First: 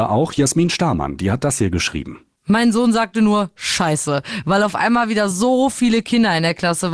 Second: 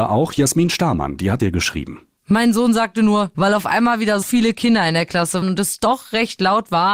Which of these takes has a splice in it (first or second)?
second